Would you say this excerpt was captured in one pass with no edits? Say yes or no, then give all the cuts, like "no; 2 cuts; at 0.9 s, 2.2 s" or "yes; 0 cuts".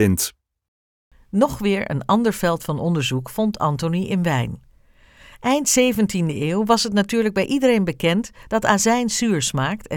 yes; 0 cuts